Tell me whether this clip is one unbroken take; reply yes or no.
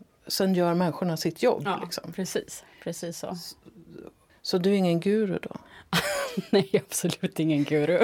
yes